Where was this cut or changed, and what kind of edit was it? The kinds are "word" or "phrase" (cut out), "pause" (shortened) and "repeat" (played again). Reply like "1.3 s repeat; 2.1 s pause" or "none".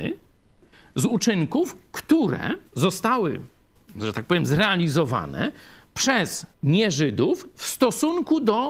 2.7 s pause; 6.5 s pause